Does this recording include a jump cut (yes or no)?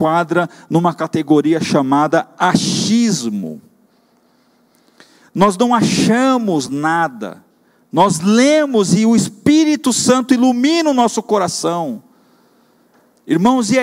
no